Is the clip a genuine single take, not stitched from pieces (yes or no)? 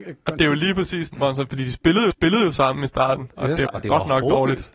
no